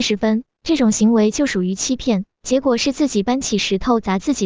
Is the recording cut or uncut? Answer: cut